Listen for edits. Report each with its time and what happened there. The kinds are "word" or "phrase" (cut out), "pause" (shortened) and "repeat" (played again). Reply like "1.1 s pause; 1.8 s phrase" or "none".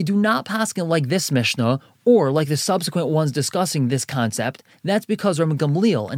none